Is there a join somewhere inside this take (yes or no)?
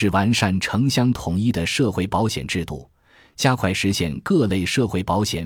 no